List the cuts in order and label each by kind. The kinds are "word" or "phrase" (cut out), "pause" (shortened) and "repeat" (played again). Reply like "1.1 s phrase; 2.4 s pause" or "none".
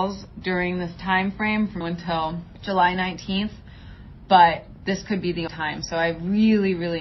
1.8 s word; 5.5 s word